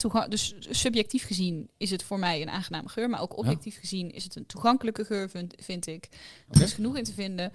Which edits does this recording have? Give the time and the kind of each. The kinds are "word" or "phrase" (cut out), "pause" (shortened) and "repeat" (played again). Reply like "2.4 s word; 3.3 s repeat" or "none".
none